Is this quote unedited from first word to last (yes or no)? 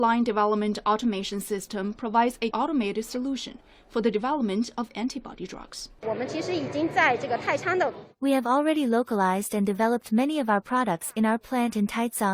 no